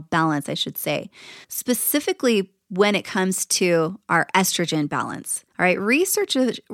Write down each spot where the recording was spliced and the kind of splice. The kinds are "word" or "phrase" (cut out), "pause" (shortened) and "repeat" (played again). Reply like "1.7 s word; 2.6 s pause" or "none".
1.4 s pause; 5.5 s pause